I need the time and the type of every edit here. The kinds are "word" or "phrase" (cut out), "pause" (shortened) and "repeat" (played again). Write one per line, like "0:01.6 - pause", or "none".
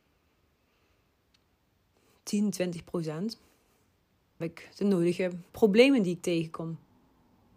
0:04.4 - word
0:05.5 - word